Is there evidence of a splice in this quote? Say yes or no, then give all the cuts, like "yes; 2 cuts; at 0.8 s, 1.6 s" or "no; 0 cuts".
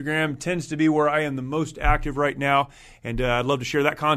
no; 0 cuts